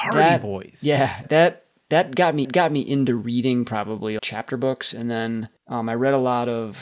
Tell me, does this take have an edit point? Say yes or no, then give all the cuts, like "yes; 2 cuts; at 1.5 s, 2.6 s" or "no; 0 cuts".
yes; 4 cuts; at 1.2 s, 2.4 s, 4.2 s, 5.6 s